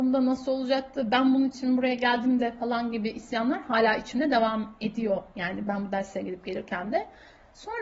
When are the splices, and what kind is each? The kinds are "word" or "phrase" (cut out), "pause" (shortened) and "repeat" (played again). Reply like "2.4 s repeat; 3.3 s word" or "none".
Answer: none